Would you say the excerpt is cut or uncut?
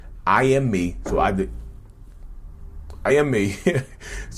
cut